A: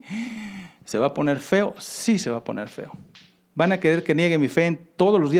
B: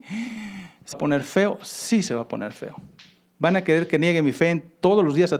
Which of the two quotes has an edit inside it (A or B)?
B